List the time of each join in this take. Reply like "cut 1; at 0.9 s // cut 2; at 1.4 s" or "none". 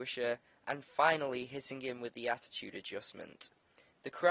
none